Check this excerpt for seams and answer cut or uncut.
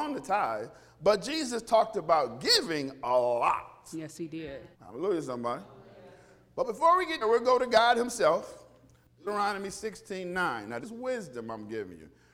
cut